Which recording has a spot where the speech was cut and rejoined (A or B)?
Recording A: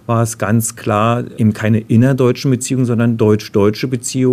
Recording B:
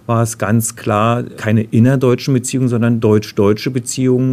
B